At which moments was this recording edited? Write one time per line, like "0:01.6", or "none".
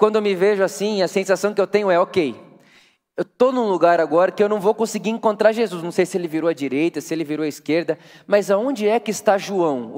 none